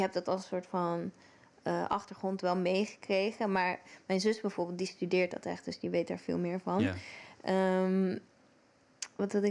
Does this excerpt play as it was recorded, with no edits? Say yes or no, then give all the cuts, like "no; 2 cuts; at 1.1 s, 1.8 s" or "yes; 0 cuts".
yes; 0 cuts